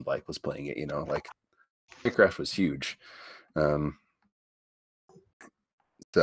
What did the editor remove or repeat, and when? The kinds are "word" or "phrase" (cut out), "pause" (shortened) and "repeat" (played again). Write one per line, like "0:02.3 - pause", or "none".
none